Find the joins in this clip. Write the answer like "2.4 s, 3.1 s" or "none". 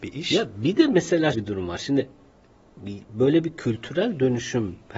1.3 s